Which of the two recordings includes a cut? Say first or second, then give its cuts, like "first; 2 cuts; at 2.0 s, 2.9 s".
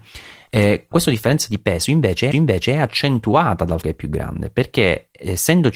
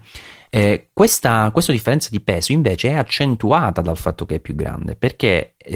first; 3 cuts; at 0.9 s, 2.3 s, 3.8 s